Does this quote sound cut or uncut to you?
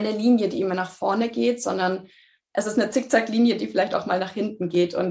uncut